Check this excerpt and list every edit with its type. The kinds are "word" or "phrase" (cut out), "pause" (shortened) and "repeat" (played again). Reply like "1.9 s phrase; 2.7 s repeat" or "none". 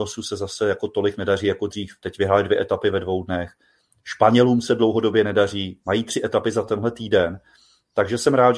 none